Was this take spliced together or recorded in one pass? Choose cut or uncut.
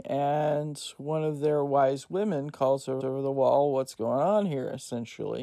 cut